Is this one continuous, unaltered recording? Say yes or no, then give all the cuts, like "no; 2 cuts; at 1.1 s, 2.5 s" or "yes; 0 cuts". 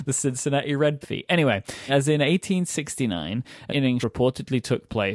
no; 4 cuts; at 1.0 s, 1.9 s, 3.7 s, 4.0 s